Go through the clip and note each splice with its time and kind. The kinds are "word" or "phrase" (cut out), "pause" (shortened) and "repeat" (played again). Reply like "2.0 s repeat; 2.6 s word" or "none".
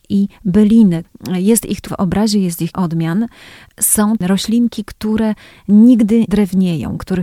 1.9 s word; 2.7 s word; 4.2 s word; 6.3 s word